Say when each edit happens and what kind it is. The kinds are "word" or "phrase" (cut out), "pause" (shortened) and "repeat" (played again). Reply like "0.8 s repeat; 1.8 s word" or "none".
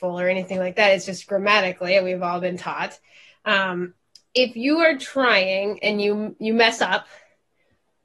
none